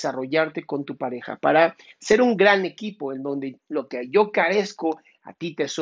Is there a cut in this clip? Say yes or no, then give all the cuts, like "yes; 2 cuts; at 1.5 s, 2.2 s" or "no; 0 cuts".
no; 0 cuts